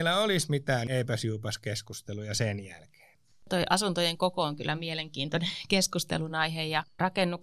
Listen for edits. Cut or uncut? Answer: uncut